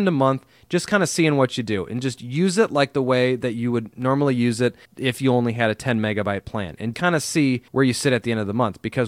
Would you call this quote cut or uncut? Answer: cut